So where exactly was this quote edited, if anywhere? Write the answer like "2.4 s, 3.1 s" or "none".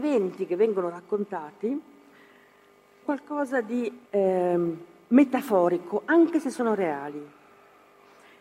3.0 s, 4.0 s